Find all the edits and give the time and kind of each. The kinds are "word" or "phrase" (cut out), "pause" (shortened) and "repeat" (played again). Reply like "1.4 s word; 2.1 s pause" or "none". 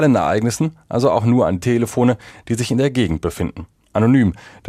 1.6 s word